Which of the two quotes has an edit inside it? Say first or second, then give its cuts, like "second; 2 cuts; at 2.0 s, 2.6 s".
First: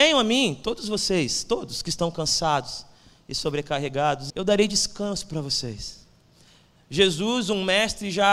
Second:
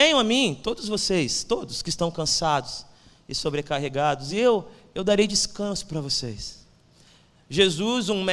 first; 1 cut; at 4.3 s